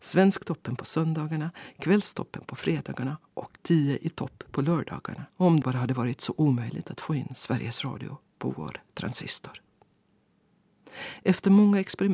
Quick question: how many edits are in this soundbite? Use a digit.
3